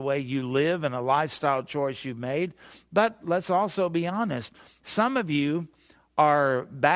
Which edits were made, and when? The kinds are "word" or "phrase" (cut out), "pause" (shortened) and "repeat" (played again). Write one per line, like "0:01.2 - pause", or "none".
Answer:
none